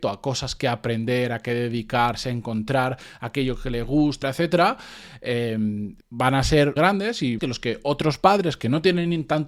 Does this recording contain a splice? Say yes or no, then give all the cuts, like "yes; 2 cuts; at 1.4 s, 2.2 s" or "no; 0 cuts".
yes; 4 cuts; at 4.2 s, 6.0 s, 6.8 s, 7.4 s